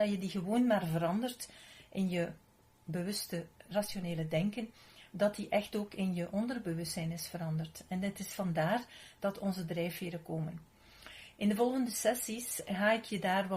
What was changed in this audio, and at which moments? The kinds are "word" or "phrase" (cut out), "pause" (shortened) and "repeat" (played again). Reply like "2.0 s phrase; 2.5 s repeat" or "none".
none